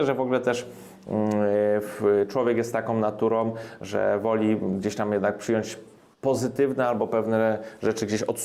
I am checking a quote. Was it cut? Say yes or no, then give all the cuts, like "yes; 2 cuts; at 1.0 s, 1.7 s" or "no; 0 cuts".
no; 0 cuts